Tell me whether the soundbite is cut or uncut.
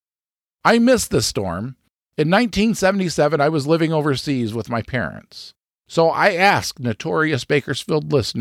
uncut